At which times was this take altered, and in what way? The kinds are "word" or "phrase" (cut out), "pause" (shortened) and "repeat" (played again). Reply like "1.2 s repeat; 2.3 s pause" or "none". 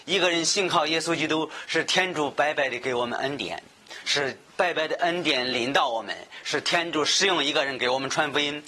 4.5 s pause

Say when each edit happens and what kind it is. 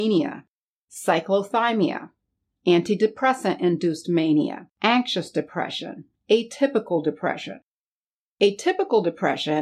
4.7 s pause

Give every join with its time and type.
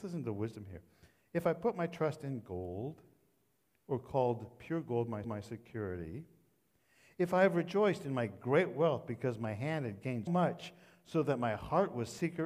5.2 s repeat; 10.3 s word

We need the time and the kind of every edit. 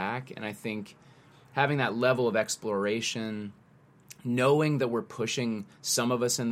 none

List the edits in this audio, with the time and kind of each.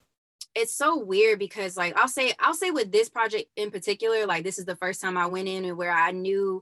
none

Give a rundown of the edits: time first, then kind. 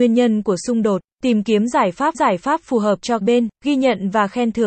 1.1 s pause; 2.1 s repeat; 3.2 s phrase; 3.6 s pause

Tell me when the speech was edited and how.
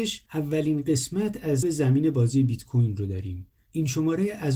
1.6 s phrase

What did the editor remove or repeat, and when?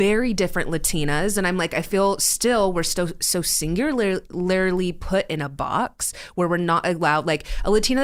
none

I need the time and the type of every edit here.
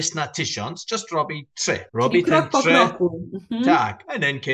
1.9 s pause

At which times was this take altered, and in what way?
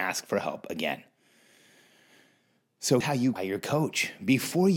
3.0 s word; 3.4 s word

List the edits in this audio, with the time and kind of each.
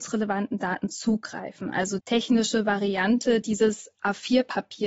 2.0 s word

